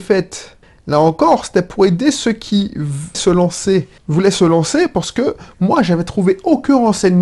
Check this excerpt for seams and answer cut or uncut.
cut